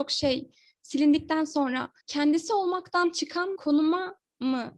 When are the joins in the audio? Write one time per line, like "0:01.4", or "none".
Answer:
0:02.0
0:03.6